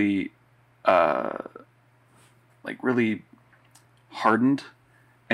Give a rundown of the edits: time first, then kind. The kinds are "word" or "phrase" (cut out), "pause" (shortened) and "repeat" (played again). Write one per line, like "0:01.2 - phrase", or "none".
none